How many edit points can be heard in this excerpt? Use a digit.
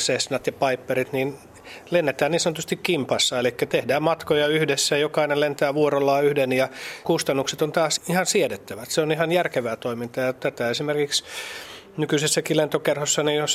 3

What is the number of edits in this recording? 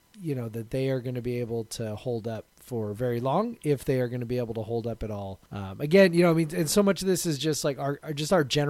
1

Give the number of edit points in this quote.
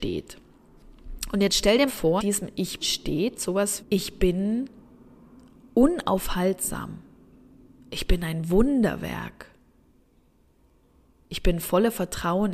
4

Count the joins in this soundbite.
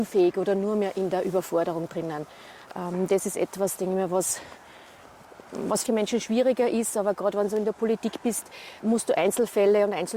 2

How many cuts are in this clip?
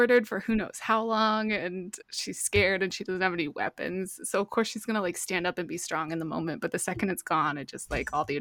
1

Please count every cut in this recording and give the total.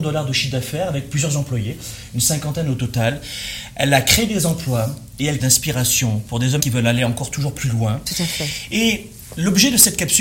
2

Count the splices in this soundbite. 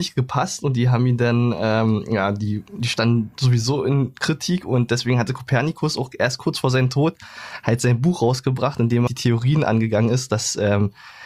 1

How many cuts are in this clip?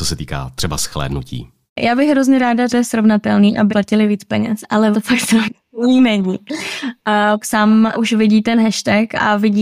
6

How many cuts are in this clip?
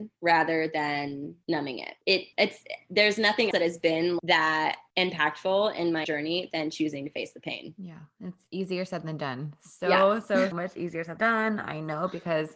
6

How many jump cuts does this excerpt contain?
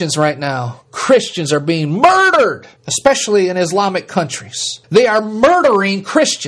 2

